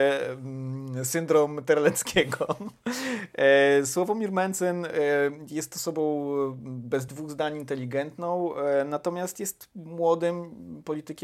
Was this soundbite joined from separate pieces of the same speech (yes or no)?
no